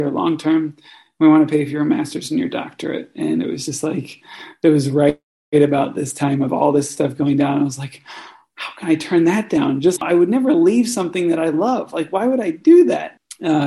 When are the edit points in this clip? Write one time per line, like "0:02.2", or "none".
0:10.0